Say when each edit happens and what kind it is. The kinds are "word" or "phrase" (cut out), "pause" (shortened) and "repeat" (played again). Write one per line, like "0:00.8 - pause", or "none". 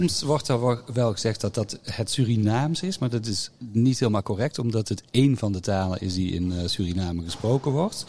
0:03.6 - pause